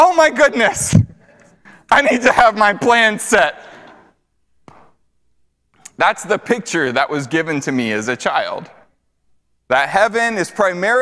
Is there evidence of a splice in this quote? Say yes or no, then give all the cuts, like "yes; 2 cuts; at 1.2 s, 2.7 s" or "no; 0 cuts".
no; 0 cuts